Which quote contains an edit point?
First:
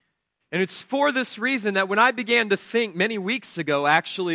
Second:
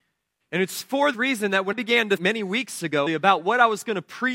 second; 4 cuts; at 1.1 s, 1.7 s, 2.2 s, 3.1 s

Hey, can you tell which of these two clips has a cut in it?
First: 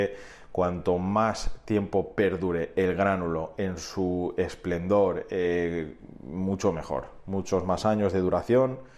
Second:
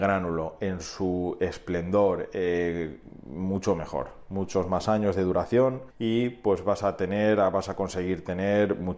second; 1 cut; at 5.9 s

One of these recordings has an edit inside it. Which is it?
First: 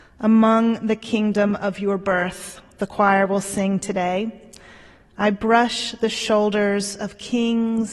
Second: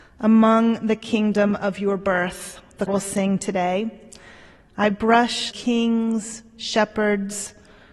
second; 2 cuts; at 2.9 s, 5.5 s

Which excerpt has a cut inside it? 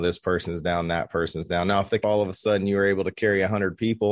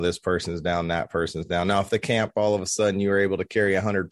first; 1 cut; at 2.0 s

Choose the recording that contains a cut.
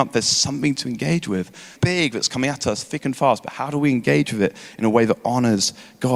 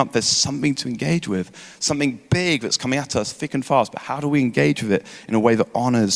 first; 1 cut; at 1.8 s

